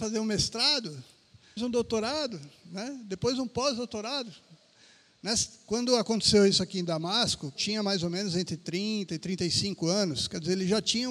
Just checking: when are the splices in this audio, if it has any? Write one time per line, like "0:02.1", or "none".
0:01.6
0:07.6